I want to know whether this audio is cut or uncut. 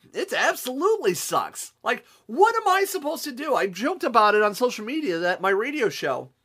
uncut